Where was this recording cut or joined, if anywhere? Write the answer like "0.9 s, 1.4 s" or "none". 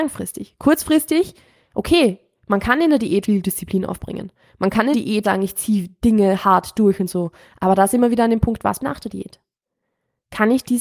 3.2 s, 4.9 s, 5.2 s, 8.8 s